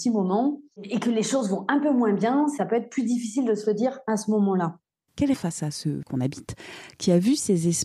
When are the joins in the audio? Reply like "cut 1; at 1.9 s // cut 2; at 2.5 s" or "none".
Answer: cut 1; at 5.3 s // cut 2; at 6.0 s